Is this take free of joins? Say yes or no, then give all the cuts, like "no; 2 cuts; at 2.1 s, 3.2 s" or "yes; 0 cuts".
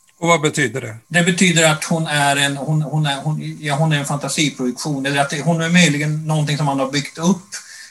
no; 1 cut; at 1.0 s